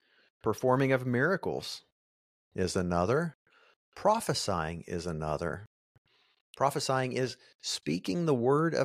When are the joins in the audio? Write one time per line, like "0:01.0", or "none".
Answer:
none